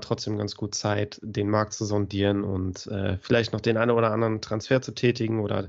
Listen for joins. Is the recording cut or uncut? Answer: uncut